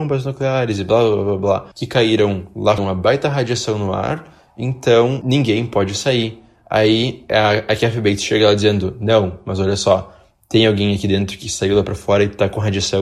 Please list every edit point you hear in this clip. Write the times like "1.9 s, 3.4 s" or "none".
1.7 s, 2.8 s